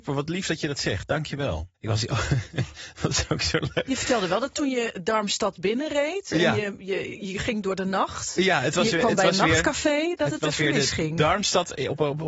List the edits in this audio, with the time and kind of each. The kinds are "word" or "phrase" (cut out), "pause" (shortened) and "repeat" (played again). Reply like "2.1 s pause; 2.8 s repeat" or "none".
1.7 s pause